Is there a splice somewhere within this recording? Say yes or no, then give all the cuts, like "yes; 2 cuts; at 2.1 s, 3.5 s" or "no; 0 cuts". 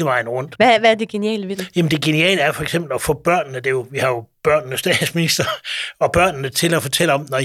no; 0 cuts